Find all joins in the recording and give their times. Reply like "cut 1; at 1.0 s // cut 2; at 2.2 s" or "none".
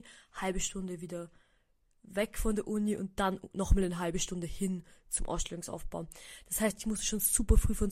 none